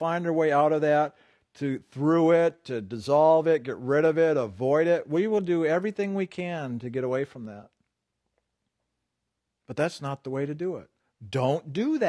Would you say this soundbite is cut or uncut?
uncut